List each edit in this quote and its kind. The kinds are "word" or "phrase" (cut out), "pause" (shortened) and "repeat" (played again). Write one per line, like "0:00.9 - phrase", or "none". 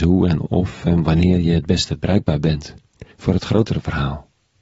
0:03.1 - pause